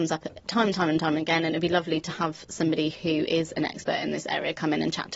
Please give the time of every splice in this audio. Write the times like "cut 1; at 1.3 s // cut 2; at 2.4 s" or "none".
none